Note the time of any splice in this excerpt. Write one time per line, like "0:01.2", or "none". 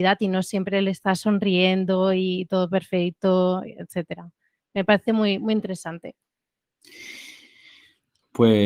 none